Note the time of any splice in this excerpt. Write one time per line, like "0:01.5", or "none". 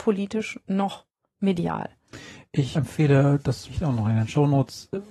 0:02.8
0:03.7